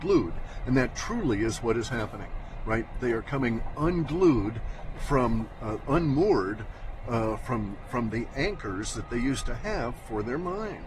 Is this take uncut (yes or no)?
yes